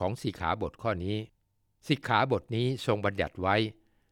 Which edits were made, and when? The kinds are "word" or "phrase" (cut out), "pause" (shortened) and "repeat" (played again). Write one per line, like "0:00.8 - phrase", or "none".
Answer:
0:01.4 - pause